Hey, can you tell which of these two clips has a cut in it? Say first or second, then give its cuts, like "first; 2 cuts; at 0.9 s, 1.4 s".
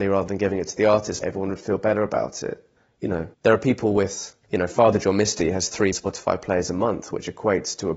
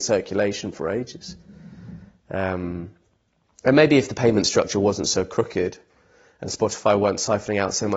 first; 5 cuts; at 1.2 s, 2.8 s, 3.3 s, 4.4 s, 5.9 s